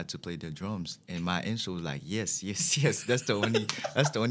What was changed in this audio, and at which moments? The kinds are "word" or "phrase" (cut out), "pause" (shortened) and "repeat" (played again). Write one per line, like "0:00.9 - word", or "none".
none